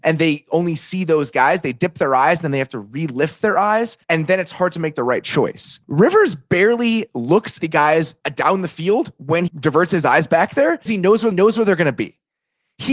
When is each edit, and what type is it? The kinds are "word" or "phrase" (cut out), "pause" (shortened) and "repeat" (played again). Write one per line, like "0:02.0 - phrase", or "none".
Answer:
0:04.0 - pause
0:05.8 - pause
0:07.6 - word
0:08.2 - pause
0:09.5 - word
0:10.9 - word
0:11.3 - repeat